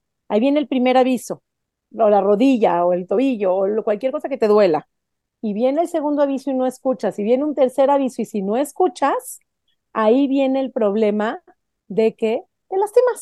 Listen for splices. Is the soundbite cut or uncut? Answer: uncut